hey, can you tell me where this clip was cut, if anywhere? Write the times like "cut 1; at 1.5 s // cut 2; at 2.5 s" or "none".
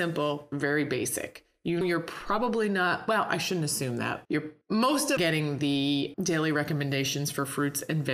cut 1; at 1.8 s // cut 2; at 4.2 s // cut 3; at 4.6 s // cut 4; at 5.2 s // cut 5; at 6.1 s

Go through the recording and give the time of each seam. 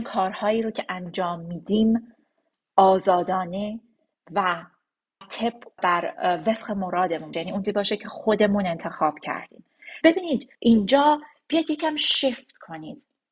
cut 1; at 5.2 s // cut 2; at 5.8 s // cut 3; at 7.3 s // cut 4; at 7.6 s // cut 5; at 10.0 s // cut 6; at 10.5 s

